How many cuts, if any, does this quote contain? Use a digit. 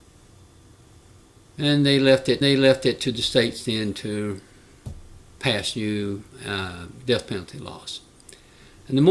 1